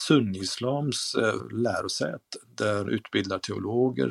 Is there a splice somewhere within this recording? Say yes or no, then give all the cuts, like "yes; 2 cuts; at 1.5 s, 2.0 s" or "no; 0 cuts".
yes; 2 cuts; at 1.4 s, 2.8 s